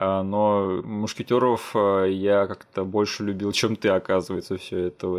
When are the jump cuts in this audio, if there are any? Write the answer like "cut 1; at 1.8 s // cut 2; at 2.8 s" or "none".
none

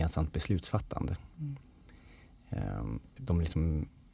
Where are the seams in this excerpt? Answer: cut 1; at 3.2 s

